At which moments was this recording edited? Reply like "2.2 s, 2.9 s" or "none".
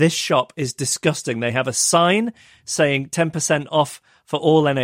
none

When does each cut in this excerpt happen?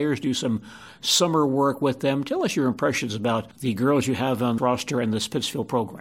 3.5 s, 4.6 s

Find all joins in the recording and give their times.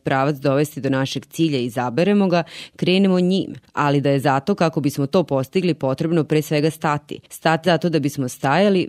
7.6 s

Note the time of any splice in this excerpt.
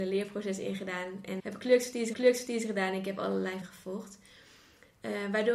1.4 s, 2.1 s, 3.6 s

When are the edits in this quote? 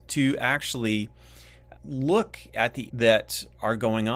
1.7 s, 2.9 s

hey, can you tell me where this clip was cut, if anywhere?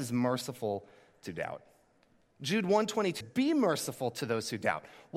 1.3 s, 3.2 s

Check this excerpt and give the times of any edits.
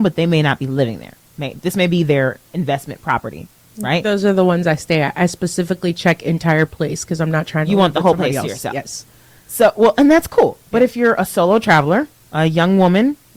none

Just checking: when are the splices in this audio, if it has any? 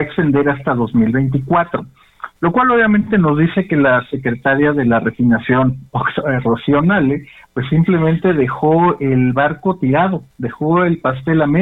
none

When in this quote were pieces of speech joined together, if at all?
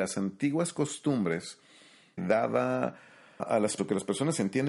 2.2 s, 3.4 s, 3.8 s

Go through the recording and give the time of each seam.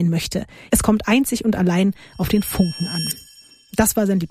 none

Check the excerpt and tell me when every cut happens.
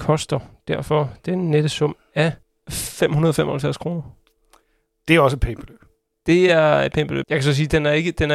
none

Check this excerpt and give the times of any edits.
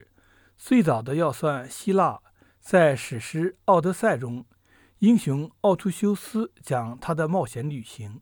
none

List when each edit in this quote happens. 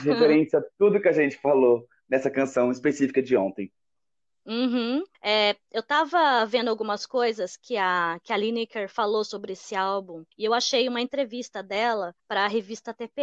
5.1 s, 10.3 s, 12.2 s

